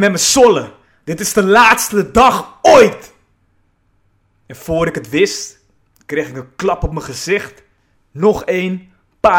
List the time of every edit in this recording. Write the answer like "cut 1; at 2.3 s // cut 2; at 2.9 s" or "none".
none